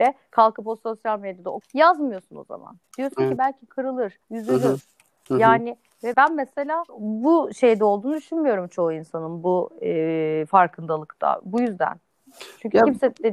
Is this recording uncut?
no; 6 cuts; at 1.6 s, 2.8 s, 3.4 s, 4.2 s, 6.1 s, 6.9 s

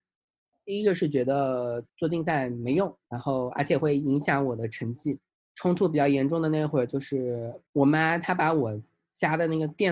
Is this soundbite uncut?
no; 4 cuts; at 1.9 s, 3.0 s, 5.3 s, 7.7 s

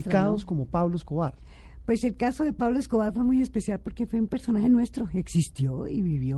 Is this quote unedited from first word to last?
yes; 0 cuts

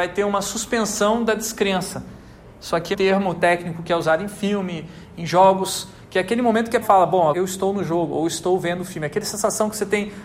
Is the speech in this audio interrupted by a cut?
yes; 3 cuts; at 2.9 s, 6.8 s, 7.3 s

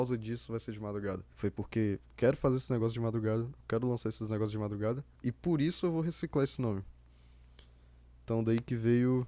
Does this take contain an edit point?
yes; 3 cuts; at 1.3 s, 2.1 s, 5.1 s

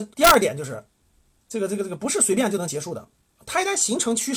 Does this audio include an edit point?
no; 0 cuts

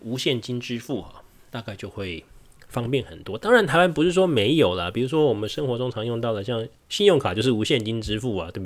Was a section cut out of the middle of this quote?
no; 0 cuts

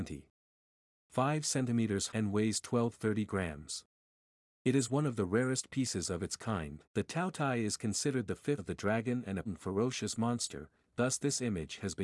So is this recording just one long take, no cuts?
no; 4 cuts; at 2.1 s, 6.8 s, 8.6 s, 9.5 s

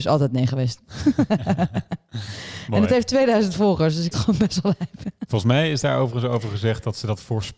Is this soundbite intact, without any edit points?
no; 1 cut; at 4.1 s

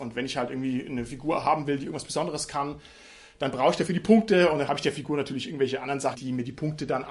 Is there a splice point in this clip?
yes; 1 cut; at 6.1 s

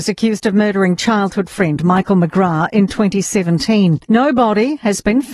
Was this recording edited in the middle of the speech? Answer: yes; 1 cut; at 4.0 s

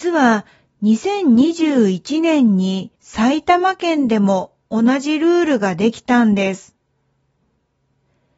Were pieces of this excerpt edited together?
yes; 1 cut; at 3.0 s

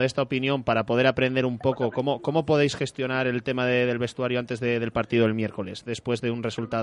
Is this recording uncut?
yes; 0 cuts

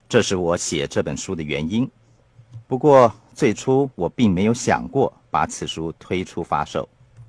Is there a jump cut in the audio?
yes; 1 cut; at 2.6 s

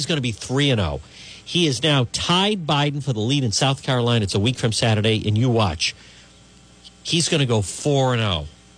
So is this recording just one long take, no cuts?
yes; 0 cuts

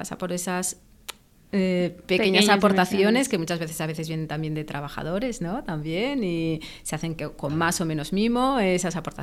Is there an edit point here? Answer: no; 0 cuts

